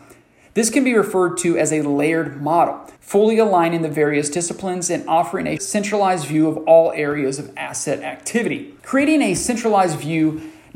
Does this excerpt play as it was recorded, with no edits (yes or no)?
no